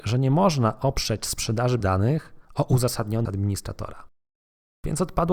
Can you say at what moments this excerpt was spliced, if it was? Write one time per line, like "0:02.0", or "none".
0:01.8
0:02.4
0:03.2

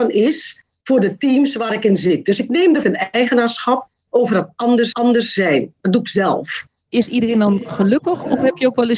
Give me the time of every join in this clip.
0:02.8
0:04.9

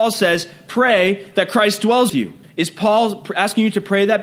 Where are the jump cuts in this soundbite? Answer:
0:02.1
0:02.4

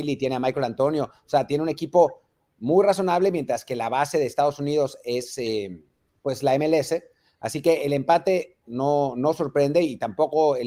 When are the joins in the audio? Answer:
none

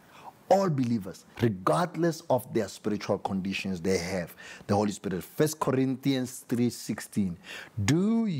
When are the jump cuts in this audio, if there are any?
0:01.3

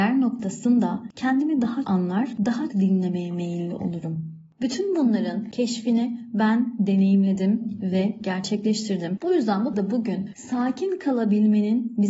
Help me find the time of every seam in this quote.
0:01.8
0:02.7
0:09.7

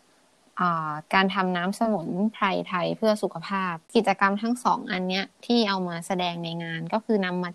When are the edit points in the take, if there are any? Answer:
0:01.1
0:03.8

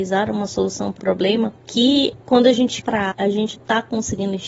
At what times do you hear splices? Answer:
0:01.0
0:02.8
0:03.1
0:03.5

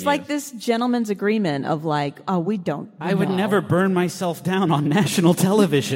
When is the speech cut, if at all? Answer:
none

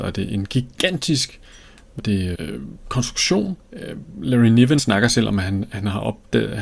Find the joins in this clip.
0:02.0
0:02.3
0:03.6
0:04.8

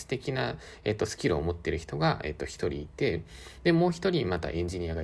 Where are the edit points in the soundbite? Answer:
none

